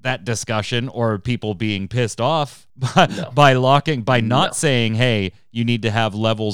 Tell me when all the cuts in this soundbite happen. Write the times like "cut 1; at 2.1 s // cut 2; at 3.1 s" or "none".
cut 1; at 2.7 s